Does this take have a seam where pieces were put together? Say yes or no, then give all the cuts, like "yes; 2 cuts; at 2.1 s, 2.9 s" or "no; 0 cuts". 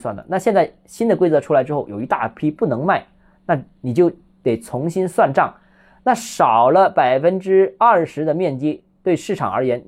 no; 0 cuts